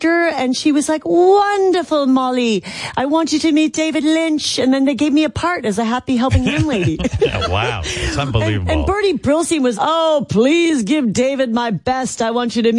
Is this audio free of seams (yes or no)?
no